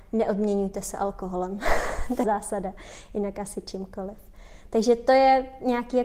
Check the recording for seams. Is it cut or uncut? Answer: cut